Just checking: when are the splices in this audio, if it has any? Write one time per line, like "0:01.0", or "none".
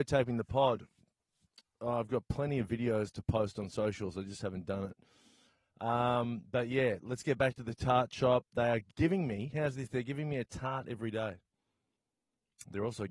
0:08.9